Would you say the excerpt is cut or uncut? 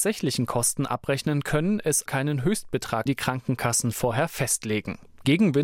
cut